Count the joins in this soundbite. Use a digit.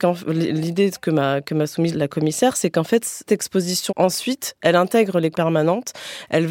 4